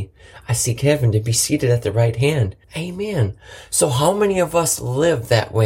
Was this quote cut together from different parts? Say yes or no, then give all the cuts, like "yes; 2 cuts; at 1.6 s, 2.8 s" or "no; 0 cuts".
yes; 1 cut; at 2.6 s